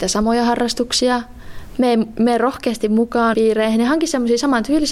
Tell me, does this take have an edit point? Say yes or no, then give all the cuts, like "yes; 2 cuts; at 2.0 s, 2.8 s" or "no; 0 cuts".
yes; 1 cut; at 3.3 s